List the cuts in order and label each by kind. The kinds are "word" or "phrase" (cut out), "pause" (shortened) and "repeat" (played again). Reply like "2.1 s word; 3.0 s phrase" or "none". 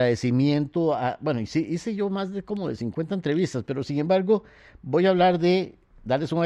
none